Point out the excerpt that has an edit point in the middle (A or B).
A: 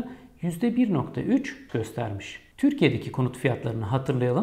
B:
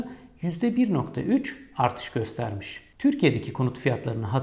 A